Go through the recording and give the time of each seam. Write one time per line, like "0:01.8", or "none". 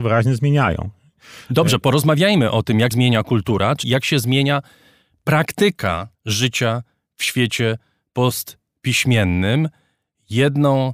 0:02.9
0:03.8
0:06.1